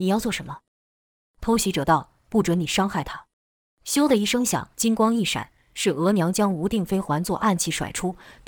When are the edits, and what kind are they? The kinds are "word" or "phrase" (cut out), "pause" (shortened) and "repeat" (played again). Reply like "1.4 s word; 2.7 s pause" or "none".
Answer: 3.3 s pause; 4.7 s pause